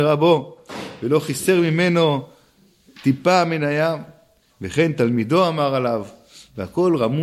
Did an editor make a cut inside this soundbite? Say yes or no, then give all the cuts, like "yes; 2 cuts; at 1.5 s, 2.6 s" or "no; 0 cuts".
no; 0 cuts